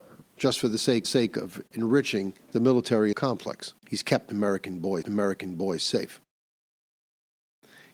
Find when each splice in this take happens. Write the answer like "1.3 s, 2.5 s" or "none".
1.0 s, 2.4 s, 3.1 s, 3.8 s, 5.0 s